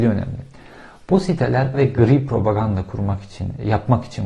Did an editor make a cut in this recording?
yes; 1 cut; at 1.7 s

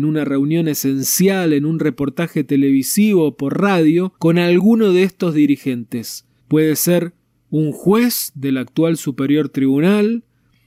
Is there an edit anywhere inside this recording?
yes; 2 cuts; at 4.2 s, 6.4 s

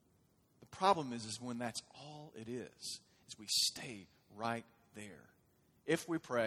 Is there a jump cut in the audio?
no; 0 cuts

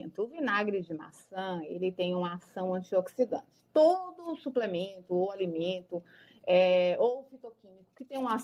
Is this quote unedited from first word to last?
yes; 0 cuts

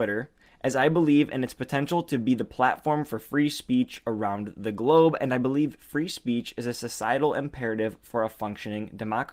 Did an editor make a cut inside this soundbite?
no; 0 cuts

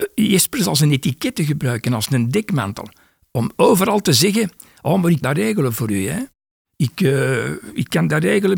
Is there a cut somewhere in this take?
yes; 1 cut; at 5.2 s

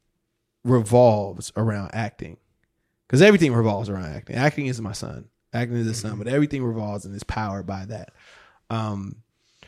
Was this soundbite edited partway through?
no; 0 cuts

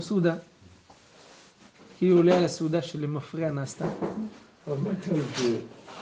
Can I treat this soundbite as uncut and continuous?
yes; 0 cuts

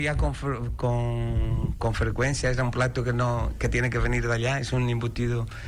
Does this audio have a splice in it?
no; 0 cuts

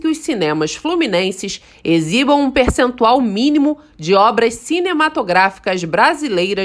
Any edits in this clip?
no; 0 cuts

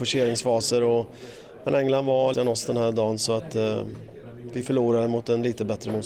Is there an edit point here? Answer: yes; 1 cut; at 2.3 s

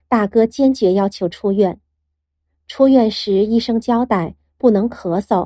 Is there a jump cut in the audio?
no; 0 cuts

